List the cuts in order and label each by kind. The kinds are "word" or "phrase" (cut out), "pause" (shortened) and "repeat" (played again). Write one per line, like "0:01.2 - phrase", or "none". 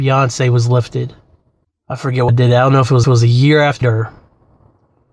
0:01.6 - pause
0:02.3 - word
0:03.0 - repeat
0:03.8 - word